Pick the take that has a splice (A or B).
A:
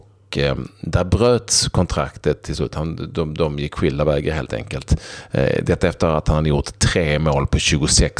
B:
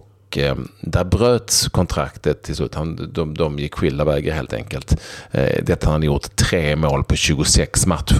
B